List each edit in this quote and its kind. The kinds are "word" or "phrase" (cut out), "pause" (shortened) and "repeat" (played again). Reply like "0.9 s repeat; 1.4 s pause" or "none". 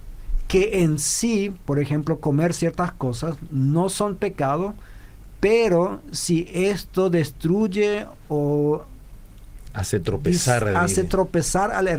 none